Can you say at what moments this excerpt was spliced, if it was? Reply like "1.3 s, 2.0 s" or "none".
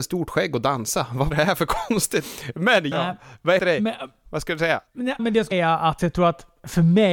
1.3 s, 2.9 s, 3.6 s, 4.3 s, 5.2 s, 5.5 s, 6.0 s